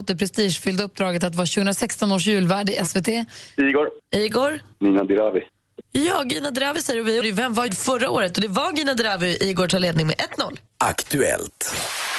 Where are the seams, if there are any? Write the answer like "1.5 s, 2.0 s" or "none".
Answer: 4.7 s, 7.2 s, 7.7 s, 10.7 s